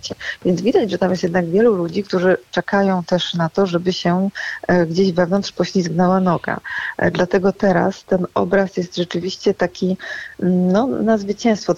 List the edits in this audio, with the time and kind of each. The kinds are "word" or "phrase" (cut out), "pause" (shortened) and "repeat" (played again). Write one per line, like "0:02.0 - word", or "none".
none